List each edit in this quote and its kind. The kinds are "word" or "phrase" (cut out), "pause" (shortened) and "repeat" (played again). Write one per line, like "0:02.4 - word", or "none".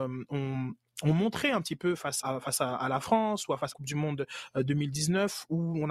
0:02.2 - word
0:03.7 - phrase